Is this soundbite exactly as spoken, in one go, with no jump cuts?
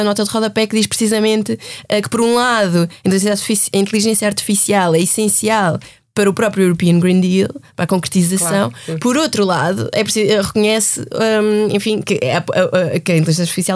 yes; 0 cuts

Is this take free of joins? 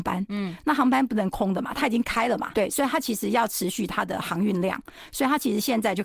no; 1 cut; at 2.5 s

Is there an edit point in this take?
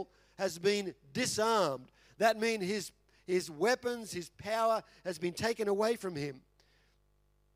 no; 0 cuts

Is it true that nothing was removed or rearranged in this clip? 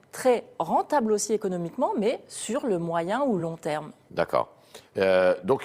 yes; 0 cuts

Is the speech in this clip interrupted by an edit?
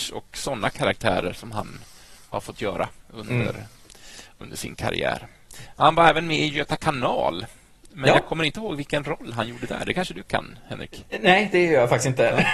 no; 0 cuts

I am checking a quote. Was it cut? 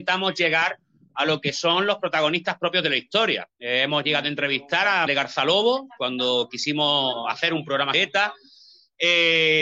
yes; 2 cuts; at 5.1 s, 7.9 s

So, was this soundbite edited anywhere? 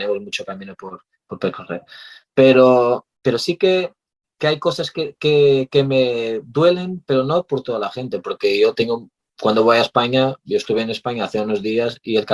no; 0 cuts

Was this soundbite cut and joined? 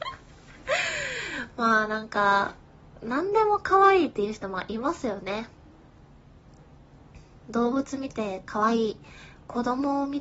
no; 0 cuts

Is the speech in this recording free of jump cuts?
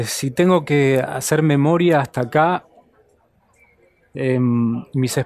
yes; 0 cuts

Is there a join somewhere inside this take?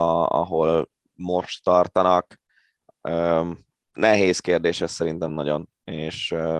no; 0 cuts

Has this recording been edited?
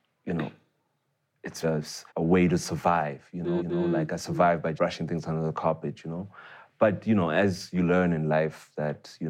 yes; 4 cuts; at 1.6 s, 2.1 s, 3.6 s, 4.8 s

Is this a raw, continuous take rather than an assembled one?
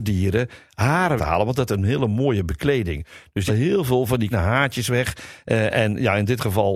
no; 4 cuts; at 1.2 s, 1.7 s, 3.5 s, 4.3 s

